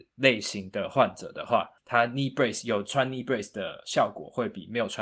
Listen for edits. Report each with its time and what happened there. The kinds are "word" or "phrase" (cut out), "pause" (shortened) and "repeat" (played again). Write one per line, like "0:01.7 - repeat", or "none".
0:01.8 - pause